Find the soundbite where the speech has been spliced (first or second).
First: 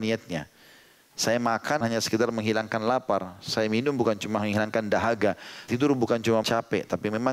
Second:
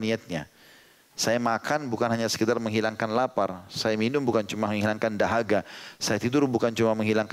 first